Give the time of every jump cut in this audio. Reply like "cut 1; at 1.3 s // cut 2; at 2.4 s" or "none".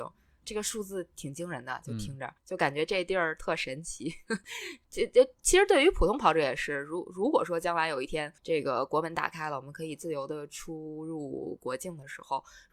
cut 1; at 2.4 s // cut 2; at 8.4 s